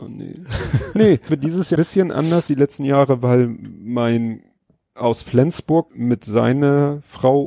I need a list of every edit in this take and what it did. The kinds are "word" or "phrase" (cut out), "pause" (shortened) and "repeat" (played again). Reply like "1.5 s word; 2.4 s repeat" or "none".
1.3 s word; 1.8 s word; 2.5 s word; 4.9 s word; 5.9 s word

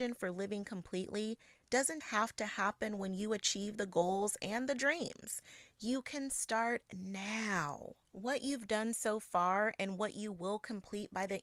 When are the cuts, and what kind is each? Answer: 2.0 s word; 8.0 s pause

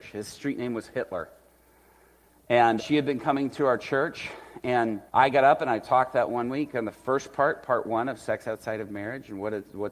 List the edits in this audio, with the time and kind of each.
2.8 s word; 5.1 s pause

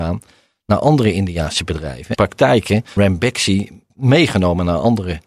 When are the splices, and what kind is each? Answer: 2.1 s phrase; 3.0 s word; 3.9 s pause

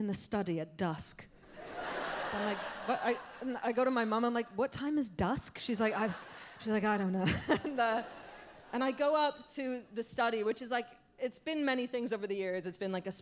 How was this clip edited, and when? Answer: none

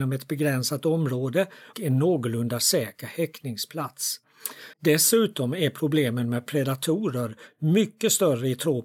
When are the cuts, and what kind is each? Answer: 1.7 s word; 4.7 s pause; 6.5 s phrase

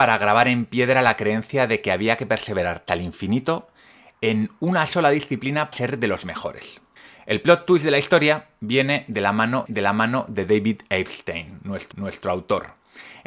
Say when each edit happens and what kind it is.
2.9 s word; 5.7 s phrase; 7.0 s pause; 9.7 s repeat; 11.9 s repeat

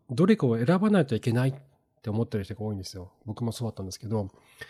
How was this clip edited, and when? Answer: none

